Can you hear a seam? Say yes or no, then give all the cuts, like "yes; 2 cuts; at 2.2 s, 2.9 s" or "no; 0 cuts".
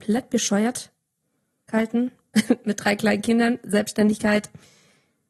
no; 0 cuts